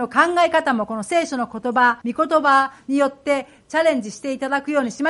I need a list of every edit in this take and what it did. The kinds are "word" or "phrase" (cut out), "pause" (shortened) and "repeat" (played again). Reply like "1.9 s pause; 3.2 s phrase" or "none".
2.0 s pause